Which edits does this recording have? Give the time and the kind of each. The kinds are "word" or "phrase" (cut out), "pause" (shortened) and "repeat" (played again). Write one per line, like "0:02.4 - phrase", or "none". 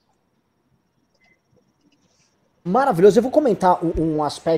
none